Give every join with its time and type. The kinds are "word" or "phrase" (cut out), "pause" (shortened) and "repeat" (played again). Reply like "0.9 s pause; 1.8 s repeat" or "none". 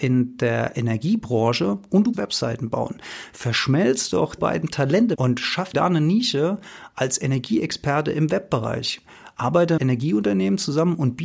2.1 s word; 4.4 s word; 5.2 s word; 5.7 s word; 9.8 s word